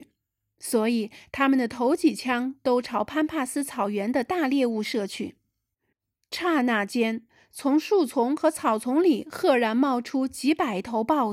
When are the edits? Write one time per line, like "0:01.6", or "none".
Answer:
none